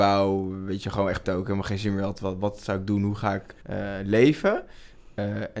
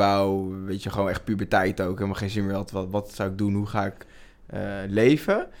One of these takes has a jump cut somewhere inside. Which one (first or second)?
first